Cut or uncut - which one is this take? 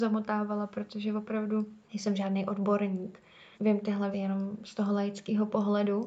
cut